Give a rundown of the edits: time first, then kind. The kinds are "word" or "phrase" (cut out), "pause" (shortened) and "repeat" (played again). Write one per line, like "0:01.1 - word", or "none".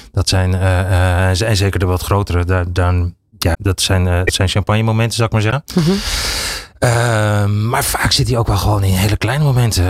none